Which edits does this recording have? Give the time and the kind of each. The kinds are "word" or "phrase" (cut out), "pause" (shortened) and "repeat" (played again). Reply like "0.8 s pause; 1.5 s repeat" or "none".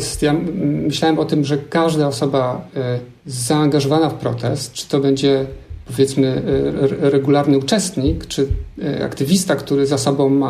3.2 s pause